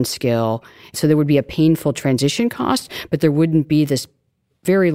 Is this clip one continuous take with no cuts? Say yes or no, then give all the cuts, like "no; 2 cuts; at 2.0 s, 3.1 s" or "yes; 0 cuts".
yes; 0 cuts